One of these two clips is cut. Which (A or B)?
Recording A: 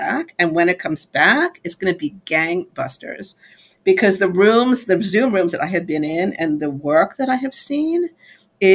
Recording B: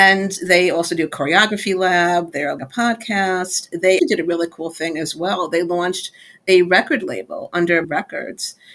B